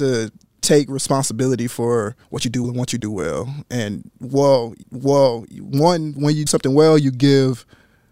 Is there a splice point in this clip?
yes; 5 cuts; at 2.2 s, 2.6 s, 3.0 s, 4.8 s, 6.5 s

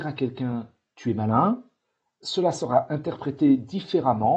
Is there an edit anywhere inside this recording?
no; 0 cuts

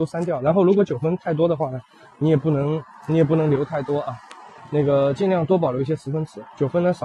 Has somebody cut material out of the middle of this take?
no; 0 cuts

